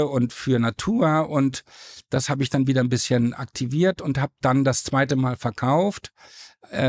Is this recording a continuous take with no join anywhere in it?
yes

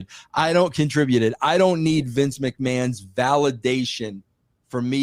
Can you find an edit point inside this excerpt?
no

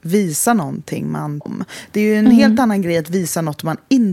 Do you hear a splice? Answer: yes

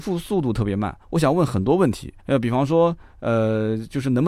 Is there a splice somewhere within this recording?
yes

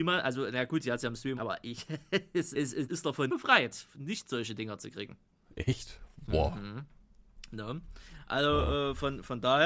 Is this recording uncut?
no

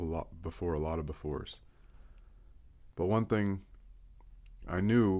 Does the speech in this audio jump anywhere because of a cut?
yes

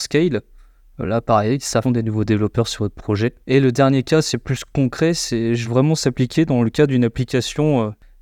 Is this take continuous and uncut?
no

